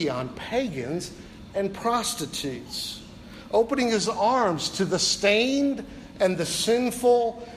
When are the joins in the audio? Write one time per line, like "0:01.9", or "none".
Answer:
none